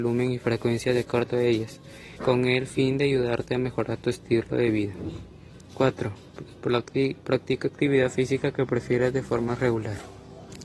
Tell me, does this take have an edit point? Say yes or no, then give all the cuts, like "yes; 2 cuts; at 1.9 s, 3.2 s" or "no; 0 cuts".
yes; 1 cut; at 2.2 s